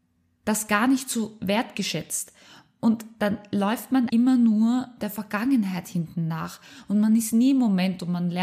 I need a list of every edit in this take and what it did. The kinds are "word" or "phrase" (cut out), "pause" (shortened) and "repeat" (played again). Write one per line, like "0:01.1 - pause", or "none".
0:04.1 - word